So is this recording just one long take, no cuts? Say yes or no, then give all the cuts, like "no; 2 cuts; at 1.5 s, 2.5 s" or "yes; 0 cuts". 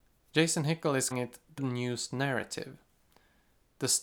no; 2 cuts; at 1.1 s, 1.6 s